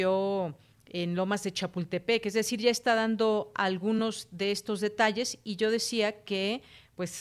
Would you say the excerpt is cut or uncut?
uncut